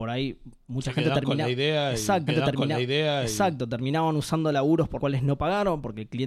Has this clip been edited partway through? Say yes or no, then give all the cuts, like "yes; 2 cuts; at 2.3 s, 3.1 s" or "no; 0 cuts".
yes; 2 cuts; at 2.3 s, 5.0 s